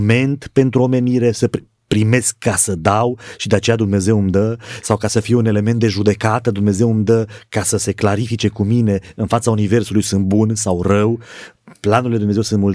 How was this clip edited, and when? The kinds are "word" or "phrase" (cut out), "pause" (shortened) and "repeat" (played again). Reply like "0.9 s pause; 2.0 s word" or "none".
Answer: none